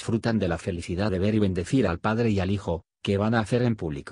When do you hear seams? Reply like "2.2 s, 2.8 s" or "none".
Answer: 1.1 s

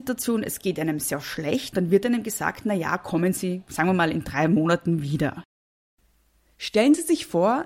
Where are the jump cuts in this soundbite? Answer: 1.7 s

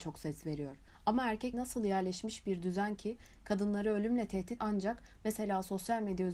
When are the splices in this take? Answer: 1.5 s, 4.6 s

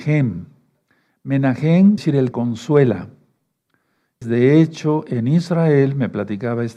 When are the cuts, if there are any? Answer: 2.0 s, 2.3 s, 4.2 s

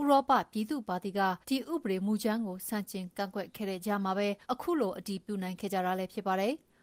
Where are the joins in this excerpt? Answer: 1.4 s, 4.4 s

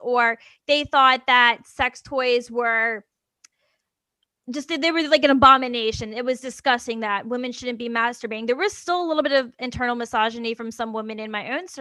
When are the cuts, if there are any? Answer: none

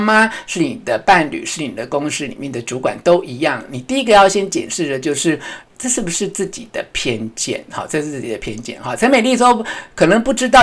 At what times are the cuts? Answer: 5.6 s

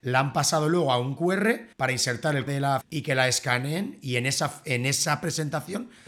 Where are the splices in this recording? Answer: 1.2 s, 1.7 s, 2.5 s, 2.8 s

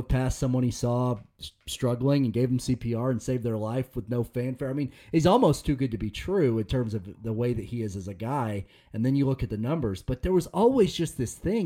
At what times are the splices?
none

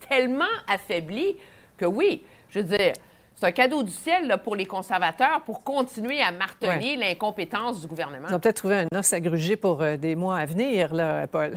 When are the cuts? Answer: none

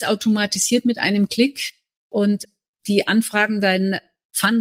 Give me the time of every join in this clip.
none

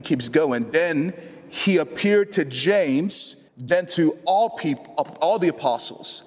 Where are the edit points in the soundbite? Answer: 3.5 s

